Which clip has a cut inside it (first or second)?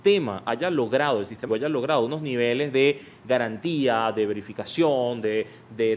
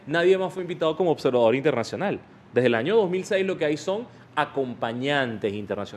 first